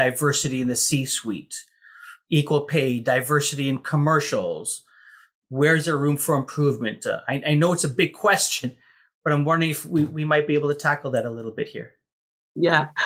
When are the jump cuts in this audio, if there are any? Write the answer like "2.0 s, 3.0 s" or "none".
none